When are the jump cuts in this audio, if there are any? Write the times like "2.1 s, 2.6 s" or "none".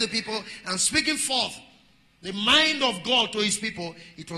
none